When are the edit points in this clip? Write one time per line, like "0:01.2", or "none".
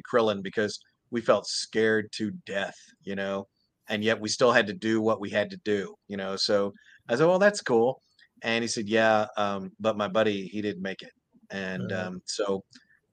none